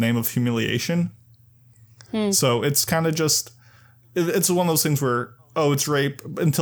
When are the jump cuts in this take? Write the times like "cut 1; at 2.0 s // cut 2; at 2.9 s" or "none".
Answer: none